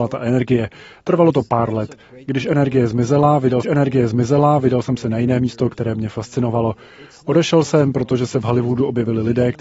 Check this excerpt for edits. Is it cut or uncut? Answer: cut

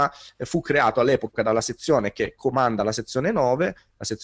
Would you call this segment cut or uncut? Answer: uncut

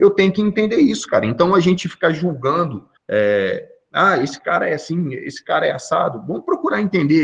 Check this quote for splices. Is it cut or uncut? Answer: cut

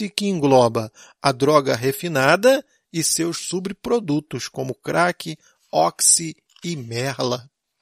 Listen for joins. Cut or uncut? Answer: uncut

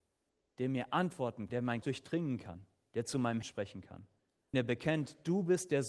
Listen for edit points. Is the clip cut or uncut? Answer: cut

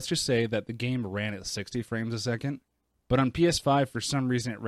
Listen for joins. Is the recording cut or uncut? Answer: uncut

